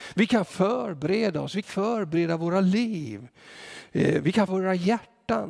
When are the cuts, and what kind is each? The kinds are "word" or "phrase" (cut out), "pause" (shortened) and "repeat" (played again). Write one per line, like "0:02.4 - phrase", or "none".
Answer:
0:01.6 - word
0:04.5 - word